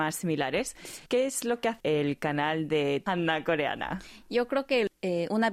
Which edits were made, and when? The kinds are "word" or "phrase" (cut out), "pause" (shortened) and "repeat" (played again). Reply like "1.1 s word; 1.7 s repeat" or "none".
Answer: 1.1 s pause; 1.8 s word